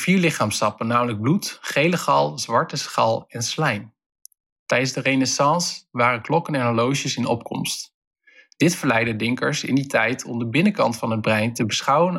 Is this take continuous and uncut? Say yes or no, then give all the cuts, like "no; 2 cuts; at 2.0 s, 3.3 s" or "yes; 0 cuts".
yes; 0 cuts